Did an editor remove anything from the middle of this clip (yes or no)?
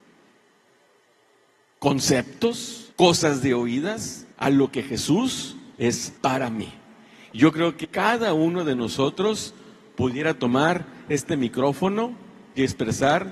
yes